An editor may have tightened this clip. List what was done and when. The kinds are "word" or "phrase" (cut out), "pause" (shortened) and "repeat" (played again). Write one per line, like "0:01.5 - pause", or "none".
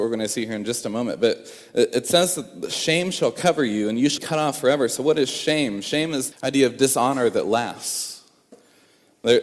0:04.2 - word
0:06.3 - word